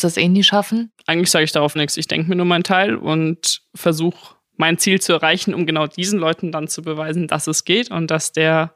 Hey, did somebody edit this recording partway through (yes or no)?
yes